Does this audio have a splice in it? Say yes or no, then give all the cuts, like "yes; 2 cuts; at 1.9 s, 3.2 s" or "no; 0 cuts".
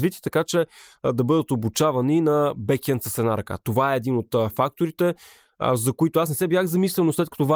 no; 0 cuts